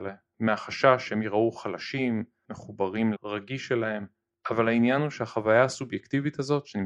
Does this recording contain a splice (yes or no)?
yes